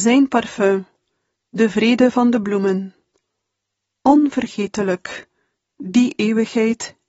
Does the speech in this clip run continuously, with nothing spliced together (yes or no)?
yes